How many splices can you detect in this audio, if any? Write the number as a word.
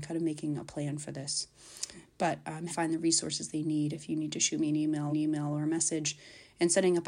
two